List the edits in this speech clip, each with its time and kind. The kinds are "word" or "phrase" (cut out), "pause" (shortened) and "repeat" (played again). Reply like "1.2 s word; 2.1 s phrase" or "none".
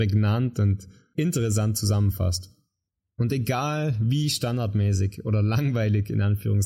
none